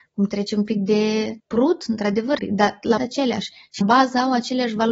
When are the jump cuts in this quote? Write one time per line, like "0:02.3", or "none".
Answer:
0:01.4
0:02.4
0:03.0
0:03.8

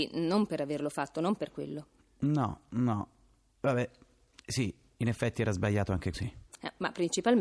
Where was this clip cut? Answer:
0:06.1

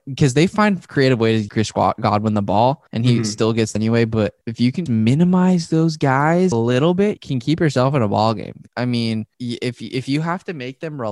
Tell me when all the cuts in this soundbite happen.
0:01.5
0:02.9
0:03.8
0:04.4
0:04.9
0:06.5
0:07.2
0:08.7
0:09.3

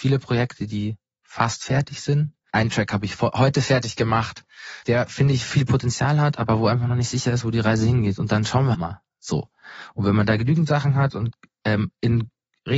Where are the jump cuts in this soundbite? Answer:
0:02.5
0:04.8
0:08.7

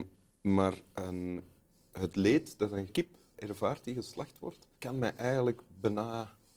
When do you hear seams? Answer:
0:02.9
0:03.4
0:04.7

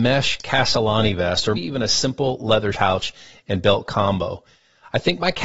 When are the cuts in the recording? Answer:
0:01.5
0:02.7

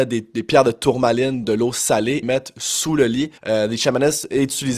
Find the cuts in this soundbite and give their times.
0:01.4
0:02.2
0:03.4

